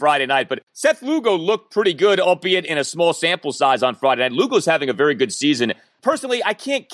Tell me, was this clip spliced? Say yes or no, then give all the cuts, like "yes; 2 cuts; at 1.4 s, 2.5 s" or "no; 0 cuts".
no; 0 cuts